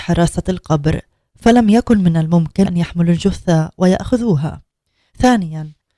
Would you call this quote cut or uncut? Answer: cut